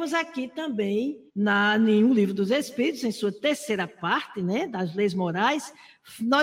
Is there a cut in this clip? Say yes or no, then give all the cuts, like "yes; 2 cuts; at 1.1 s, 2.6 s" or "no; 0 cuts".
yes; 1 cut; at 1.3 s